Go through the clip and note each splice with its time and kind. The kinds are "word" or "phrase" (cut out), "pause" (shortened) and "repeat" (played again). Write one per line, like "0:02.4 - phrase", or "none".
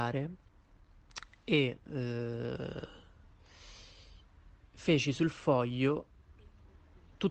none